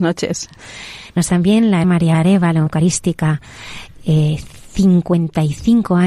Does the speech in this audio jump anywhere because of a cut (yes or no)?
yes